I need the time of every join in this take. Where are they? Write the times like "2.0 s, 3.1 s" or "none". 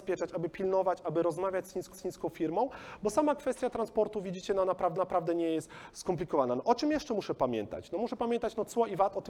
1.9 s, 5.0 s

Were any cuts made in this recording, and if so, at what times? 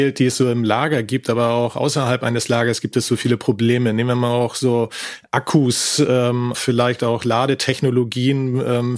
6.5 s

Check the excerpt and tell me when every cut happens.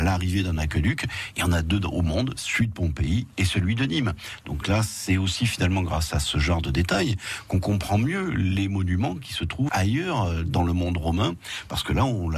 9.7 s

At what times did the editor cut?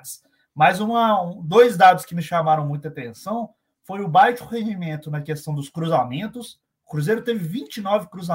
none

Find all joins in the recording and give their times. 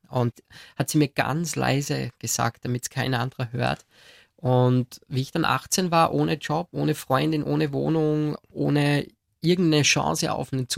none

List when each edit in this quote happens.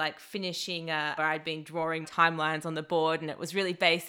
1.2 s, 2.0 s

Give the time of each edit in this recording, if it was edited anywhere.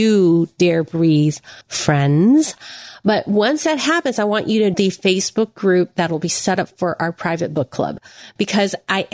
1.6 s, 4.7 s

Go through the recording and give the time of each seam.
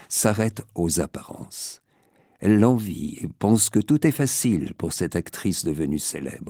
none

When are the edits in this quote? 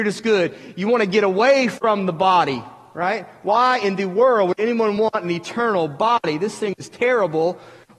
none

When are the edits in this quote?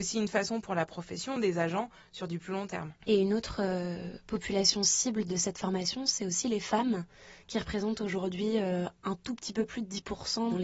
1.4 s, 3.0 s

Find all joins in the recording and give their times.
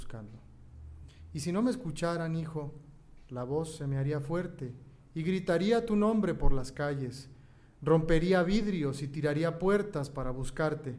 none

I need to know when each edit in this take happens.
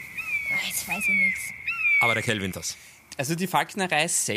2.5 s

